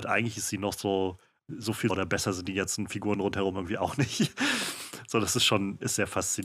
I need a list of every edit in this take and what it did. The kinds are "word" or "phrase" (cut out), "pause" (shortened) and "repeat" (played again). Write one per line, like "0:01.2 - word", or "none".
0:01.4 - word
0:01.9 - word